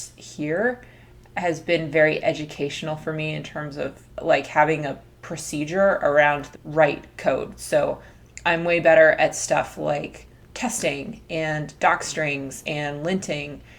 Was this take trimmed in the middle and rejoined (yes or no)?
yes